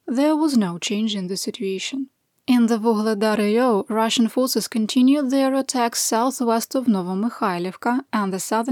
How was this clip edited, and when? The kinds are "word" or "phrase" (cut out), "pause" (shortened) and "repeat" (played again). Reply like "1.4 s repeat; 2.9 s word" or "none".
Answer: none